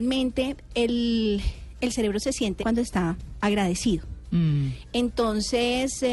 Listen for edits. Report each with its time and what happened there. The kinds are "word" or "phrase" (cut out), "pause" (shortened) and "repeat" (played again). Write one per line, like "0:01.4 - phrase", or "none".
0:02.6 - word